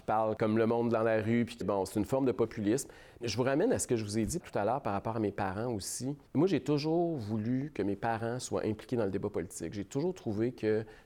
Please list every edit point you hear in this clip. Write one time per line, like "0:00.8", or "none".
0:01.6
0:06.3